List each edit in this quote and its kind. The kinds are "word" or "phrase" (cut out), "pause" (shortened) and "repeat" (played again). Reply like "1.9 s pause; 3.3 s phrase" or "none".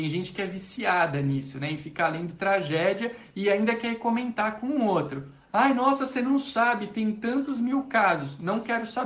none